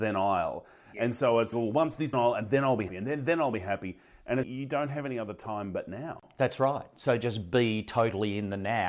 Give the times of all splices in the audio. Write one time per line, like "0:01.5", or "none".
0:01.5
0:02.1
0:02.9
0:04.4